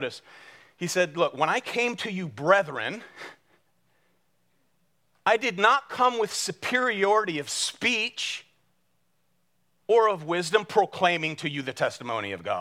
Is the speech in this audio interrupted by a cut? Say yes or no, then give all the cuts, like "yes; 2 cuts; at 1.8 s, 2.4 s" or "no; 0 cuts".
no; 0 cuts